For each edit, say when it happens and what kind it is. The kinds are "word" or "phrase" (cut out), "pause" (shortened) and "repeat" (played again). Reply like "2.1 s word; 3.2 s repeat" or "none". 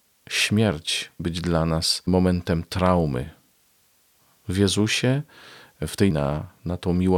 1.2 s word; 6.1 s word